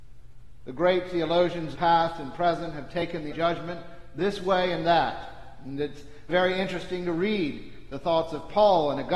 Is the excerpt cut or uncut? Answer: cut